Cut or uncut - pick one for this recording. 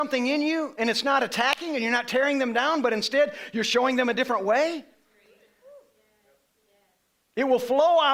uncut